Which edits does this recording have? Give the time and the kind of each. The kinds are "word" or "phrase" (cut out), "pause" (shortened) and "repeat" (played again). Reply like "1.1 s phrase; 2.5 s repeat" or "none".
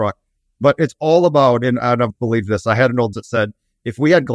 2.1 s word; 3.1 s word